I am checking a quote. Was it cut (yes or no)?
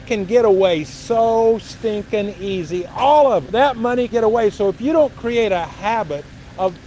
yes